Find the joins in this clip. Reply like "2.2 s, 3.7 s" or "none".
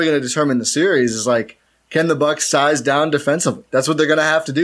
none